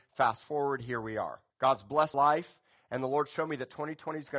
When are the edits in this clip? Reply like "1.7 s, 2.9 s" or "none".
1.5 s, 2.1 s